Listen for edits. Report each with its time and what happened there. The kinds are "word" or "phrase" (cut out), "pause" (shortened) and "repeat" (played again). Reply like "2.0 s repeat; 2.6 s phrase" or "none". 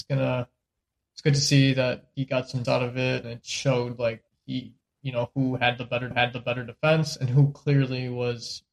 2.1 s word; 2.6 s word; 3.2 s word; 4.3 s pause; 6.1 s repeat